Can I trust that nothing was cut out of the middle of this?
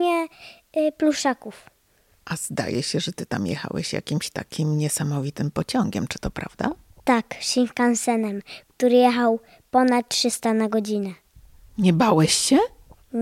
no; 1 cut; at 7.0 s

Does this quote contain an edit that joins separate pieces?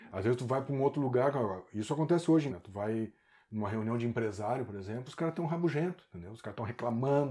yes; 1 cut; at 2.5 s

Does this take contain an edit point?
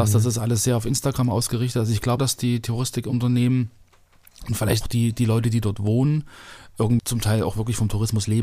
yes; 3 cuts; at 2.2 s, 4.8 s, 7.0 s

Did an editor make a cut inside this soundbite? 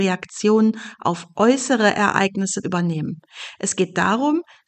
yes; 1 cut; at 2.6 s

